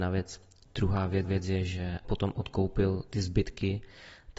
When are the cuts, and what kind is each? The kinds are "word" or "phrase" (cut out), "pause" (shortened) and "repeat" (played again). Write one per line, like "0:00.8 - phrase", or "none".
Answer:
0:01.2 - repeat
0:02.0 - word